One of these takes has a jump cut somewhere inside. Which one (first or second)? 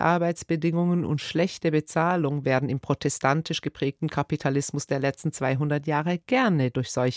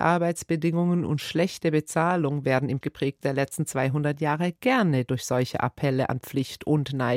second